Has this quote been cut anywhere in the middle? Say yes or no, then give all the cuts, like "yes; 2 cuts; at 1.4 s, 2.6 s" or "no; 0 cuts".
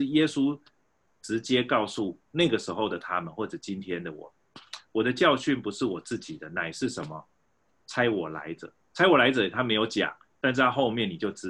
no; 0 cuts